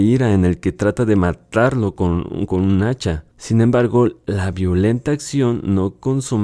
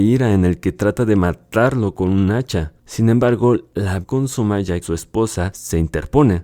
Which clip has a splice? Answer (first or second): second